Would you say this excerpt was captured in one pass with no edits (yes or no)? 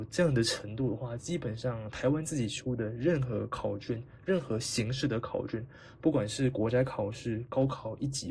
yes